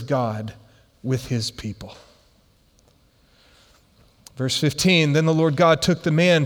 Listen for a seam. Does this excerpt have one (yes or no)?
no